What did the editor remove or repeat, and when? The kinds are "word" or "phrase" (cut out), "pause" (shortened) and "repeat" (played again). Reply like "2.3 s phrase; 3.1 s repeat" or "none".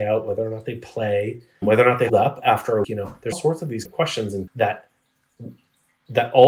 1.6 s word; 2.1 s word; 2.8 s word; 3.3 s word; 3.8 s word; 4.5 s word